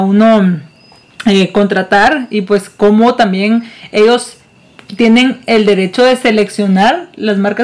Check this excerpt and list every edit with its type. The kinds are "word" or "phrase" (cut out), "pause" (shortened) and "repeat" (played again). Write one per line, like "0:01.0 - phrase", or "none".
none